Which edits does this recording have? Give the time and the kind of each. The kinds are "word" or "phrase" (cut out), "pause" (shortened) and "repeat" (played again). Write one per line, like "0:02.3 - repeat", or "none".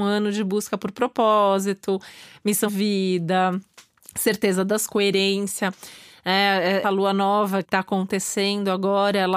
0:02.7 - word
0:04.9 - word
0:06.8 - word
0:07.6 - word

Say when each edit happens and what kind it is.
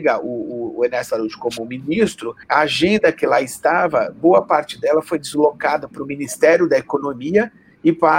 0:02.4 - pause

